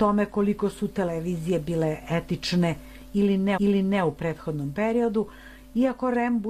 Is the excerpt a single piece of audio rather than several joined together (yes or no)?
no